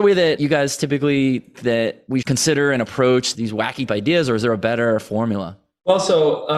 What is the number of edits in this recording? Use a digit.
4